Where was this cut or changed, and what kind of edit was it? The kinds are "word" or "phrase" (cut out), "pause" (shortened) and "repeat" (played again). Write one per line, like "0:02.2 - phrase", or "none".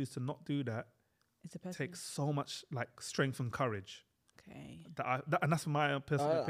none